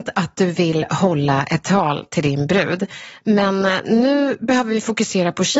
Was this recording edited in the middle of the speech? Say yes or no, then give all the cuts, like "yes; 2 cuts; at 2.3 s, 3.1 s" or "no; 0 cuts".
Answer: no; 0 cuts